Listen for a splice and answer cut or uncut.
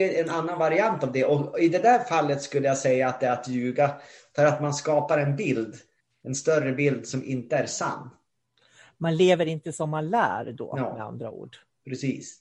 uncut